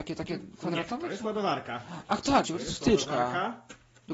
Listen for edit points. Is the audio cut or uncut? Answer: cut